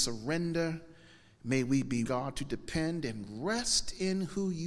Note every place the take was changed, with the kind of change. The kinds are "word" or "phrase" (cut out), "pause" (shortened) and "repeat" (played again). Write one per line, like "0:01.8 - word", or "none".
0:02.1 - word